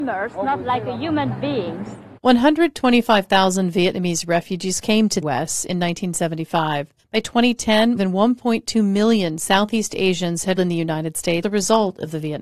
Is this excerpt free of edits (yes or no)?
no